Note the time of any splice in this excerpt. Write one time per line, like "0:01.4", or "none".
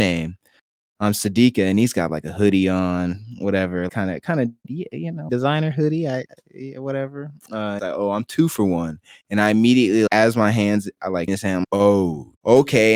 0:03.9
0:05.3
0:07.8
0:10.1
0:11.3
0:11.6